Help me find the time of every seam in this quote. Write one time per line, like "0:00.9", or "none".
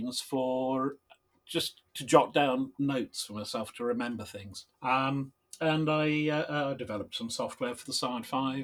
0:01.9
0:04.7